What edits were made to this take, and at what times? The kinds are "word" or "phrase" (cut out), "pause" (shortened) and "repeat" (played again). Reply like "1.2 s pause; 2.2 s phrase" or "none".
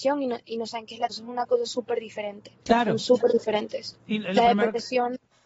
1.1 s word; 2.6 s pause